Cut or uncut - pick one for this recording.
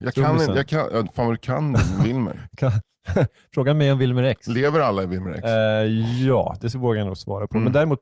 uncut